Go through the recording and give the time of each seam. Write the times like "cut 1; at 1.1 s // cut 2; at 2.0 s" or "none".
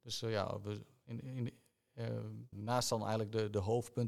cut 1; at 1.2 s // cut 2; at 2.5 s